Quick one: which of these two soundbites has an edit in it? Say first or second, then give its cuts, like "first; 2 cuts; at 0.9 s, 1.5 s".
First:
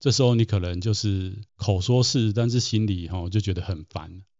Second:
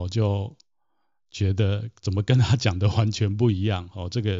first; 1 cut; at 1.5 s